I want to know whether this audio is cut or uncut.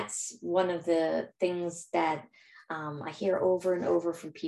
uncut